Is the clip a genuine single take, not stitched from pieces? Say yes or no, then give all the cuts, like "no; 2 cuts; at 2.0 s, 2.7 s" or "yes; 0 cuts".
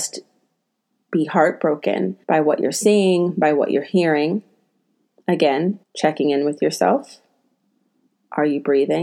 no; 2 cuts; at 2.2 s, 5.8 s